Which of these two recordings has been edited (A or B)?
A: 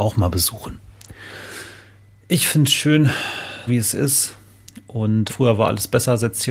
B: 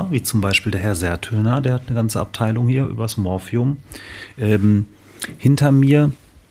A